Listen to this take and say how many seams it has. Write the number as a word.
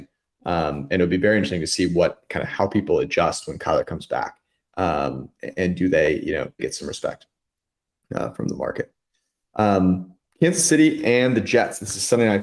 one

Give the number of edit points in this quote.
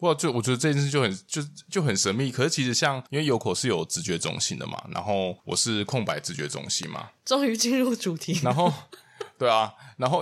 two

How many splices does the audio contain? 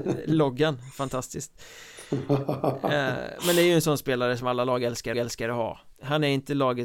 two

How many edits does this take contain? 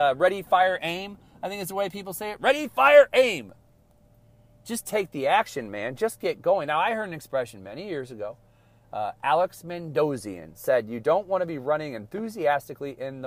zero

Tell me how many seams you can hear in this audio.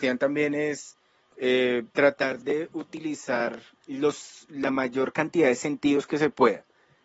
two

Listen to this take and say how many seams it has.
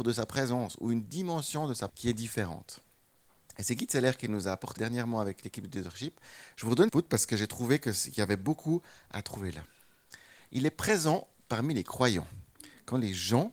three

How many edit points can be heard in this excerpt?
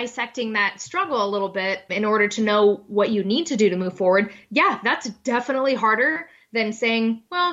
one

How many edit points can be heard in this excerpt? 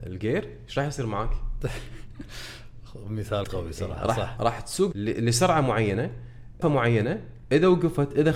four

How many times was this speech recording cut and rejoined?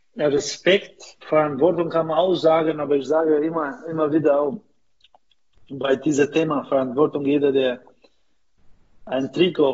one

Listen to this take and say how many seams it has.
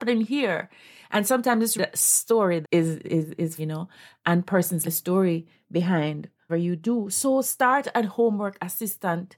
six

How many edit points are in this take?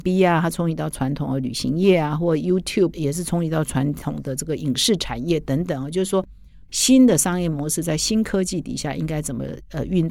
one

